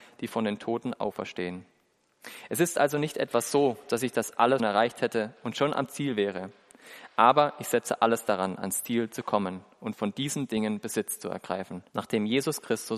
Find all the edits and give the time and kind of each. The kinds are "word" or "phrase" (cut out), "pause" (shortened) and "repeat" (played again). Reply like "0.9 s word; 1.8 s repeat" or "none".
4.6 s word; 11.9 s pause